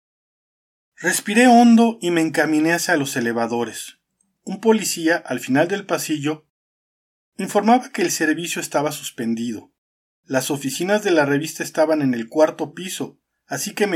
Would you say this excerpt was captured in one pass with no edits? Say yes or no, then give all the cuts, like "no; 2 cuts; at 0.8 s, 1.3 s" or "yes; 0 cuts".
yes; 0 cuts